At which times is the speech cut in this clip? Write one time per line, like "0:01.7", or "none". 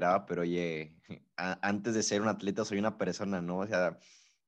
0:01.3